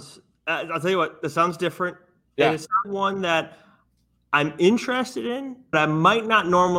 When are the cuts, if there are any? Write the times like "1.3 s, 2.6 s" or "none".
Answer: 2.8 s, 5.7 s